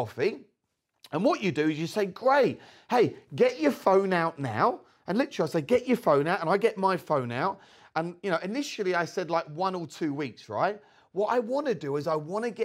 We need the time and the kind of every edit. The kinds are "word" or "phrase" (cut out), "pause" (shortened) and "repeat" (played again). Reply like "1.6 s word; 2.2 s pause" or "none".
none